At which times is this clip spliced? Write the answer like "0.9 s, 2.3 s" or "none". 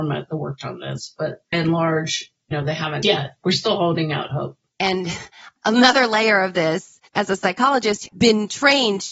1.5 s, 3.0 s, 3.4 s, 4.7 s, 7.1 s, 8.1 s